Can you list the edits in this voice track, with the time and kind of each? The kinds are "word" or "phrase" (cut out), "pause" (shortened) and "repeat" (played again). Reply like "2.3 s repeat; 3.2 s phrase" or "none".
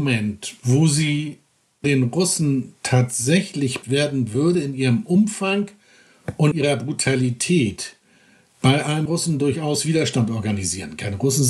1.8 s word; 3.8 s word; 6.5 s word; 9.1 s word